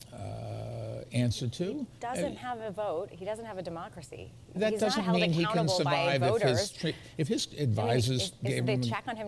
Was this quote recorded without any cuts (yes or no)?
no